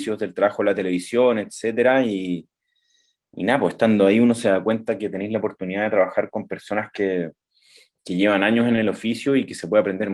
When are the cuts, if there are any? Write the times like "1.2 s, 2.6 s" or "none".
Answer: none